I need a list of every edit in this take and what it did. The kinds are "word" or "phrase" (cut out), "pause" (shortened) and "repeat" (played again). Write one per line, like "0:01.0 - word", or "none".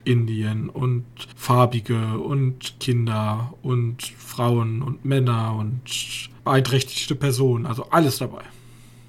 0:01.3 - pause
0:06.4 - pause